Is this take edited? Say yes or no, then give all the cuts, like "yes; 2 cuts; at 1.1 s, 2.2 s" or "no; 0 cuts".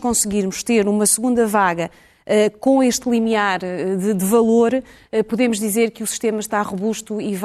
no; 0 cuts